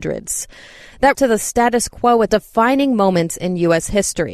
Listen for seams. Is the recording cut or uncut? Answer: cut